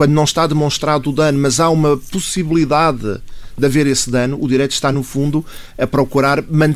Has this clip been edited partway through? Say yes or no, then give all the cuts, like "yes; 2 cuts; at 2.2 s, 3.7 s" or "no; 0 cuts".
no; 0 cuts